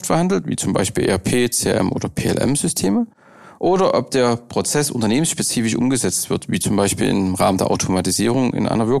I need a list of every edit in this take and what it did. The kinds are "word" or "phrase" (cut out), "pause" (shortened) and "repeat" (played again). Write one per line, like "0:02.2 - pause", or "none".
none

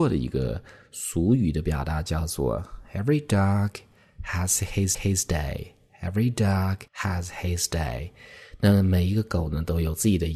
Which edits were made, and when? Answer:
0:04.9 - repeat
0:06.9 - pause

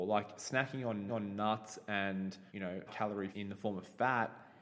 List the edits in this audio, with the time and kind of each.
0:01.1 - repeat
0:02.5 - pause
0:02.9 - word
0:03.3 - word

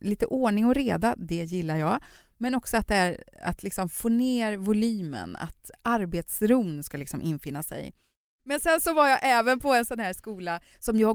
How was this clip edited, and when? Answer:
none

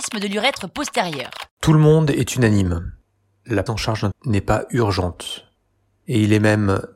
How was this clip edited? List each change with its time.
0:01.5 - pause
0:03.7 - word
0:04.1 - phrase

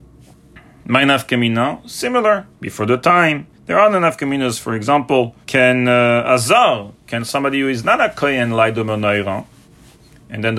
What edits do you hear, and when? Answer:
0:02.5 - pause
0:03.5 - pause
0:05.4 - pause

